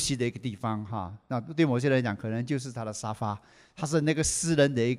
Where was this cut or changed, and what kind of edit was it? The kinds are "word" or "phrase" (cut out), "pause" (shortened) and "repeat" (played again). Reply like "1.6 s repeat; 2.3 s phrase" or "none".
none